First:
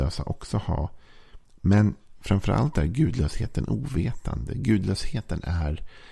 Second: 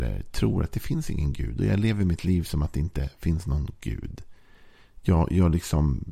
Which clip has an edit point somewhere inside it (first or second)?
first